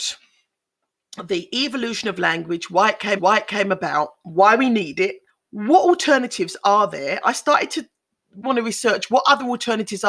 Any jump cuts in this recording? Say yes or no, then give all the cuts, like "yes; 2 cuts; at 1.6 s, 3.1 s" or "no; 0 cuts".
yes; 3 cuts; at 3.2 s, 5.3 s, 8.4 s